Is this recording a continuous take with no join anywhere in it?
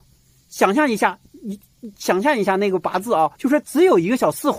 no; 1 cut; at 3.3 s

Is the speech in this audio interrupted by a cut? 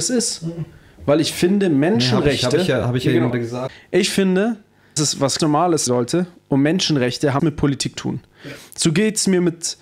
yes; 6 cuts; at 3.3 s, 5.0 s, 5.4 s, 5.9 s, 7.4 s, 8.0 s

